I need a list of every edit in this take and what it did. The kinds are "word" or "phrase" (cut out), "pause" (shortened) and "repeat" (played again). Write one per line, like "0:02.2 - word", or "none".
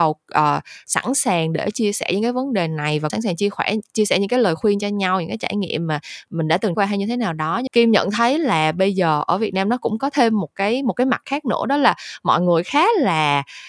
0:03.1 - word
0:06.7 - word
0:07.7 - word